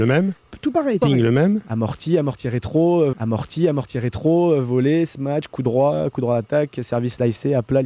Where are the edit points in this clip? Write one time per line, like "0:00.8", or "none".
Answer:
0:01.0
0:03.1